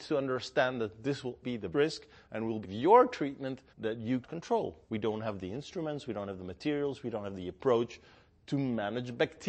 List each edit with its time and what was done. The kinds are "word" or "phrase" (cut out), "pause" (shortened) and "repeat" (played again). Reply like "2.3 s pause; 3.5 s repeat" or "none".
1.4 s word; 1.7 s word; 2.6 s phrase; 3.7 s pause; 4.2 s word; 4.8 s pause